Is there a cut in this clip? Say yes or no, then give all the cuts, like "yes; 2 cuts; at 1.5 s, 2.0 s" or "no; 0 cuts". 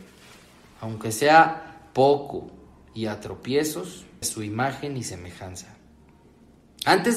yes; 1 cut; at 4.2 s